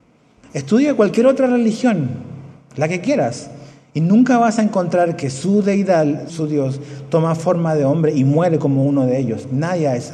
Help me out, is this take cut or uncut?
cut